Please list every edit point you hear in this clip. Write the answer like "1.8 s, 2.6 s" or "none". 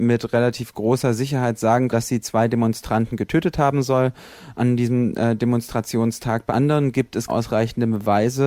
1.9 s, 6.5 s, 7.3 s